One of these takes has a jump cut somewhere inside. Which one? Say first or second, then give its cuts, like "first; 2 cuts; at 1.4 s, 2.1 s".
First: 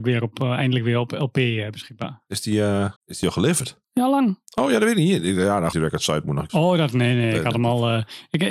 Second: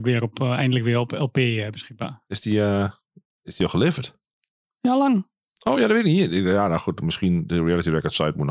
first; 5 cuts; at 3.0 s, 3.8 s, 4.5 s, 5.7 s, 6.5 s